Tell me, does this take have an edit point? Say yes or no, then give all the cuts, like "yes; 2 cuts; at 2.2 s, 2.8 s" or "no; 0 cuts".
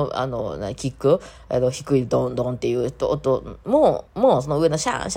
yes; 1 cut; at 4.1 s